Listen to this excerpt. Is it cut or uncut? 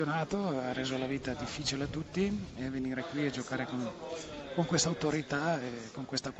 uncut